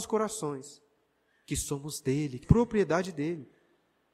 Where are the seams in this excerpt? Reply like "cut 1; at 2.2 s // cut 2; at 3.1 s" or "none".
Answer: cut 1; at 2.4 s